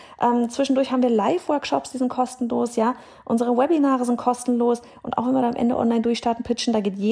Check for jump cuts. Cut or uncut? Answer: uncut